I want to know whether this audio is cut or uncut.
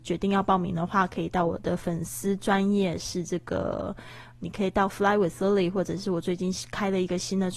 uncut